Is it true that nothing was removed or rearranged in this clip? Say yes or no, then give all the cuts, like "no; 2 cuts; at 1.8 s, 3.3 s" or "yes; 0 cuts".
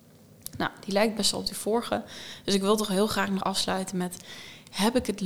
no; 1 cut; at 3.4 s